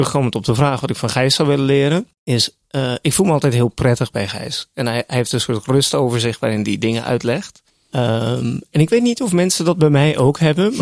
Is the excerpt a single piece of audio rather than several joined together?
no; 2 cuts; at 2.1 s, 7.7 s

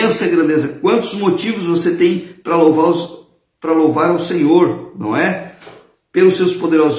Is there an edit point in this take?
no; 0 cuts

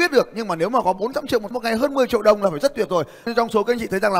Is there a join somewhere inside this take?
yes; 2 cuts; at 1.5 s, 3.3 s

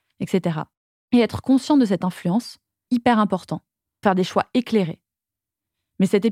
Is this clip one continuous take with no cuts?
no; 2 cuts; at 2.9 s, 4.0 s

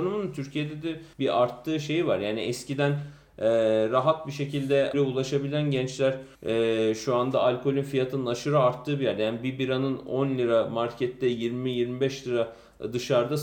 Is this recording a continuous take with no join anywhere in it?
no; 3 cuts; at 1.1 s, 4.9 s, 6.3 s

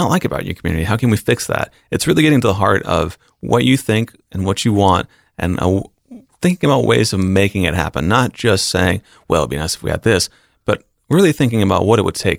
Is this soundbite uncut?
yes; 0 cuts

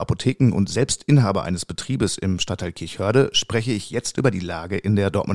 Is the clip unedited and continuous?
yes; 0 cuts

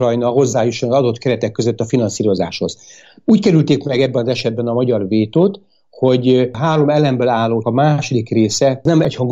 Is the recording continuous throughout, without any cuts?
no; 1 cut; at 7.6 s

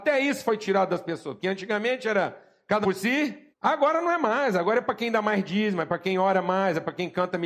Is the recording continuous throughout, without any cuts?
no; 2 cuts; at 2.8 s, 3.5 s

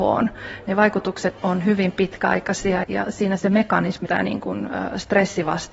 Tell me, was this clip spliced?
yes; 3 cuts; at 1.4 s, 2.8 s, 4.1 s

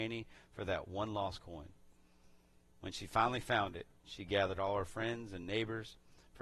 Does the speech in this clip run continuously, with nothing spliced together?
yes; 0 cuts

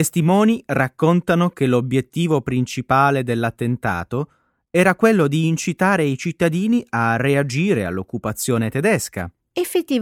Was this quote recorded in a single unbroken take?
yes; 0 cuts

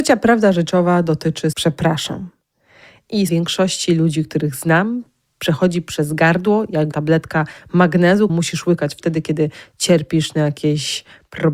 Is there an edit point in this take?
yes; 4 cuts; at 1.5 s, 3.3 s, 6.9 s, 8.3 s

